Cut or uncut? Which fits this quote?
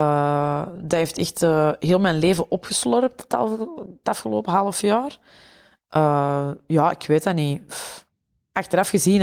uncut